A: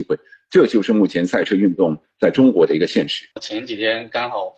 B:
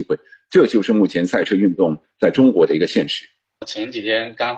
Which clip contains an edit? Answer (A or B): A